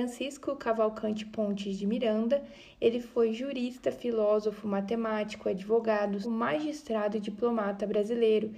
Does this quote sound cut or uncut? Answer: cut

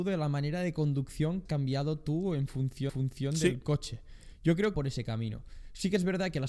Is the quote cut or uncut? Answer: cut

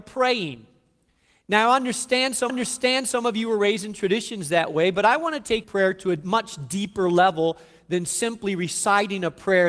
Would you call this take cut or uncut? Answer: cut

